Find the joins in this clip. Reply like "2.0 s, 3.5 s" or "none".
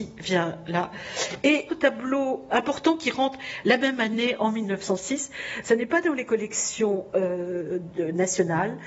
1.7 s, 2.5 s

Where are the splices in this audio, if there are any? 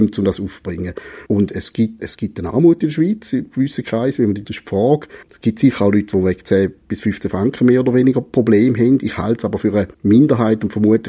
1.3 s, 2.0 s, 4.4 s, 5.2 s, 9.9 s

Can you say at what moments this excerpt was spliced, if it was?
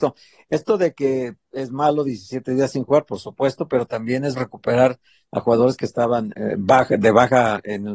4.4 s, 6.3 s

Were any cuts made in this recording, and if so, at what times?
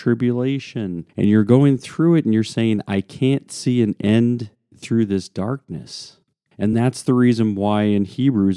none

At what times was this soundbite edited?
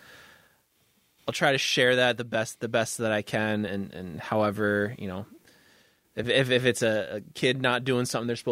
none

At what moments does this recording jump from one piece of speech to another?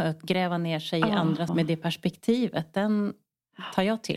1.5 s

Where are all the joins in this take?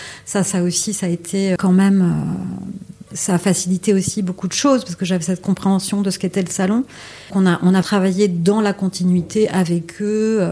1.6 s, 3.1 s, 7.3 s, 7.8 s

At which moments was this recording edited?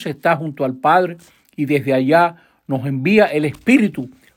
none

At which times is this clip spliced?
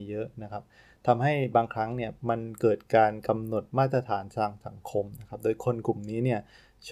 2.2 s

